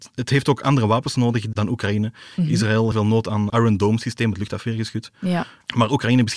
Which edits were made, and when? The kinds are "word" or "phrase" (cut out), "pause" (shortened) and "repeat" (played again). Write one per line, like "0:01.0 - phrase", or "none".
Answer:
0:02.9 - phrase
0:03.5 - phrase